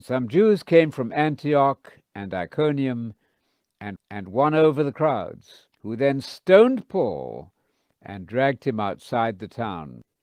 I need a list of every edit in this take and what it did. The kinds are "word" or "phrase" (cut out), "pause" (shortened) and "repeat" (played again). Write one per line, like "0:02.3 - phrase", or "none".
0:04.0 - repeat
0:05.7 - pause